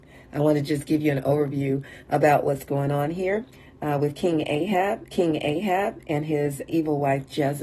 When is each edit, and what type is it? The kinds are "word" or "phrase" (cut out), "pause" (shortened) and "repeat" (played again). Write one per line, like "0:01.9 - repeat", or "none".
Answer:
0:05.1 - repeat
0:06.7 - word